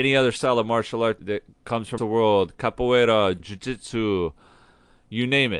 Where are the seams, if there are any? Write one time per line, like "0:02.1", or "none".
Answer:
0:01.2
0:02.0
0:03.4